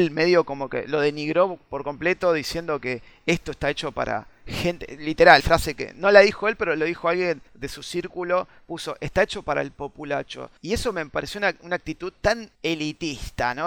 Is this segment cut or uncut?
cut